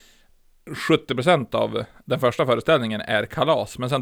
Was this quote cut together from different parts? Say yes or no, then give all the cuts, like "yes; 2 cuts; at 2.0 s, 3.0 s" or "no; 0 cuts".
no; 0 cuts